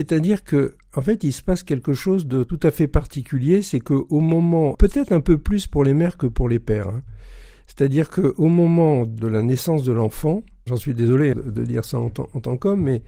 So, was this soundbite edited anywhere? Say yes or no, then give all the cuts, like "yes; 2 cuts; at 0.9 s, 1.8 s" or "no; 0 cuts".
yes; 2 cuts; at 4.7 s, 11.3 s